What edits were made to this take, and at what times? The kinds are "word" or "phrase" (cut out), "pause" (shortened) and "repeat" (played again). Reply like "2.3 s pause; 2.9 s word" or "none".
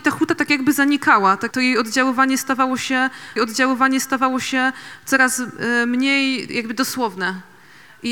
1.5 s word; 3.4 s repeat